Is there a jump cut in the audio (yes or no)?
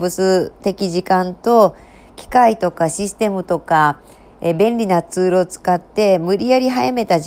no